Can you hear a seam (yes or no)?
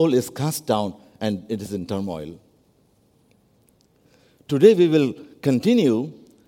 no